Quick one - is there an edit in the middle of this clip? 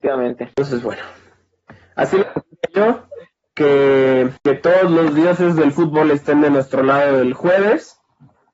no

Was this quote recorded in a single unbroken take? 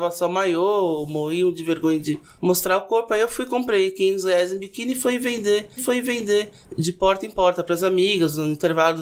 no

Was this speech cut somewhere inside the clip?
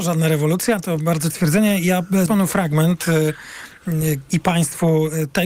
yes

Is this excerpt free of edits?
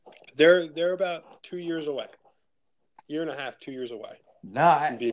yes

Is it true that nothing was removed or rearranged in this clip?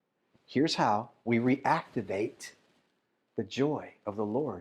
yes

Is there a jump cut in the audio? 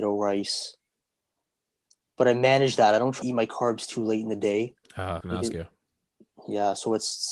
yes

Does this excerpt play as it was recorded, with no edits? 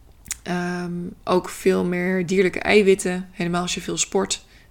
yes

